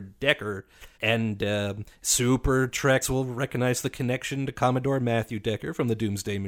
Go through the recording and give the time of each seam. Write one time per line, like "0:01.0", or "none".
0:00.9
0:03.0

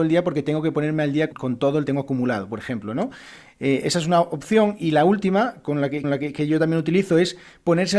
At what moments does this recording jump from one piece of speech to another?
0:01.3
0:01.9
0:06.0

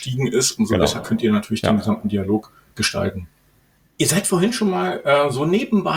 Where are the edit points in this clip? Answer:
none

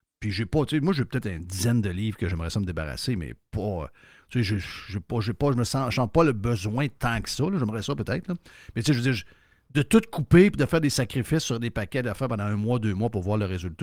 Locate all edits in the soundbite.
none

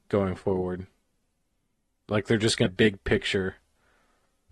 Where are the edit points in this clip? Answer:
0:02.7

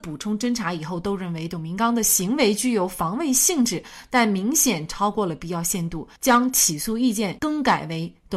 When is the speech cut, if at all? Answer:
0:06.2

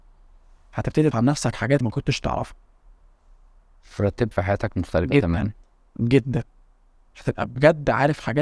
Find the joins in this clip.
0:01.1
0:01.8
0:04.3

